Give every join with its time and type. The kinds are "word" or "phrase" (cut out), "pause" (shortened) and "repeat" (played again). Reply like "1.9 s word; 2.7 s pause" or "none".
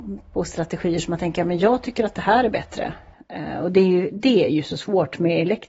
none